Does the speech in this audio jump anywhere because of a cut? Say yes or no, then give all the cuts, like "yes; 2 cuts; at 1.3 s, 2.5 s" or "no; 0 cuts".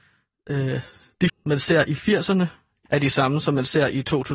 yes; 2 cuts; at 1.3 s, 2.9 s